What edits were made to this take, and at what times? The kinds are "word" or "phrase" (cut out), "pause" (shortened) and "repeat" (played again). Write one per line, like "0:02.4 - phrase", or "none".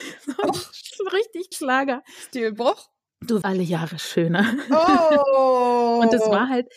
0:01.5 - word
0:03.4 - word